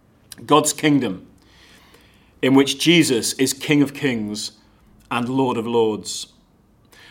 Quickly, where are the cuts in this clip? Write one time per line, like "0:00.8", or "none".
none